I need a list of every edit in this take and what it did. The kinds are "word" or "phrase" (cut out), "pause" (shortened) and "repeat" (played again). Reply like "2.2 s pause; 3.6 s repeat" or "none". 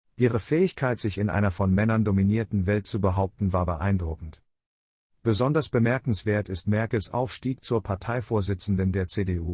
none